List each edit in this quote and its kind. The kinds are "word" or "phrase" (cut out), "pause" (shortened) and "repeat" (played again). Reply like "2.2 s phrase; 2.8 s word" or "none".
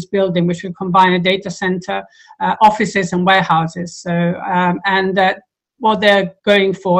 none